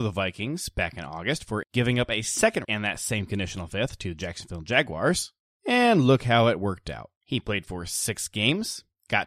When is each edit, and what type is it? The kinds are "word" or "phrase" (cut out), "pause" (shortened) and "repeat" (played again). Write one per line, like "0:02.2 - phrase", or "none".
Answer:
0:01.6 - word
0:02.6 - phrase
0:07.2 - pause